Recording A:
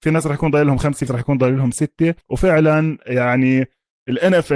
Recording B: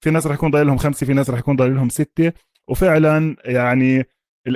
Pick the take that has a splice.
A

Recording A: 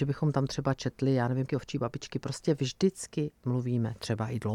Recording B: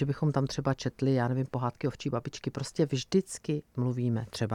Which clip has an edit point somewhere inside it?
A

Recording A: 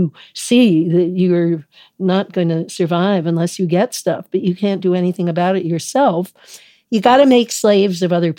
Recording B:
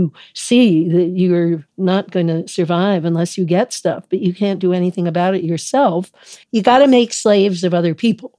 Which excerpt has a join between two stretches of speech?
B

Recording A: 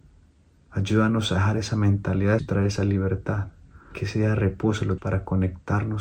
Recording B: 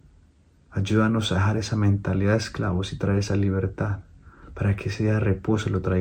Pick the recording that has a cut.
A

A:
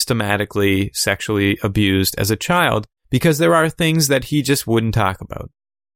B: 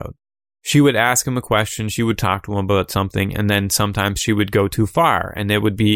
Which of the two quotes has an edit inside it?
A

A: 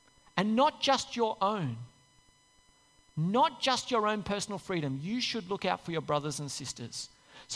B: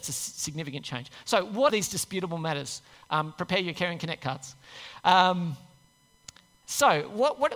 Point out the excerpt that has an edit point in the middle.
B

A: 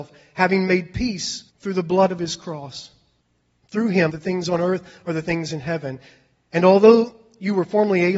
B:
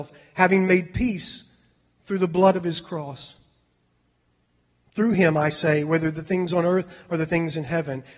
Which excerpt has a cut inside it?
A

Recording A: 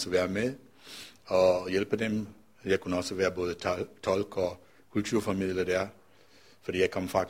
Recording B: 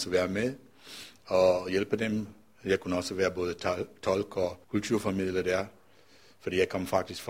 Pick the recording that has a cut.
B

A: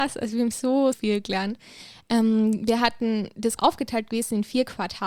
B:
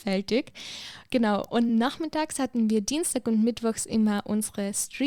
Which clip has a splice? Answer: A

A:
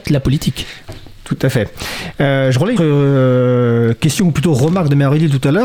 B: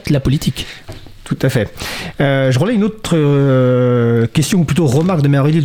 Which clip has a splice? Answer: A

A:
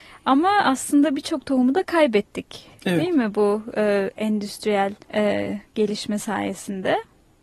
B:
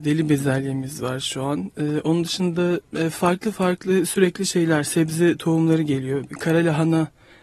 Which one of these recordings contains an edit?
A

